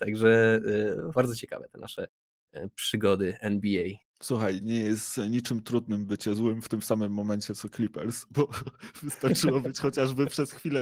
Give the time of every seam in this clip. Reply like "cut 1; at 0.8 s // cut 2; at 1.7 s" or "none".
cut 1; at 1.1 s // cut 2; at 4.0 s